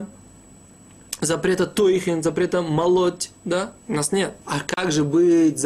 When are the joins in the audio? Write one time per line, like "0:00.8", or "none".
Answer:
0:03.8
0:04.4